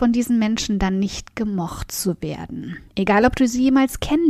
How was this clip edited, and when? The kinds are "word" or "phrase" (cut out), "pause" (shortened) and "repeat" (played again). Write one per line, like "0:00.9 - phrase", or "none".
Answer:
0:02.9 - pause